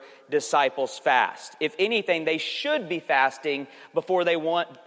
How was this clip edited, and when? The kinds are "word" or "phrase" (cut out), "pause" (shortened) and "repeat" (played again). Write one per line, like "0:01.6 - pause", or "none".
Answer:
none